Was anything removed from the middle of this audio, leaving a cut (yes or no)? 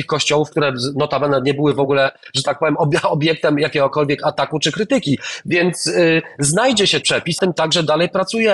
yes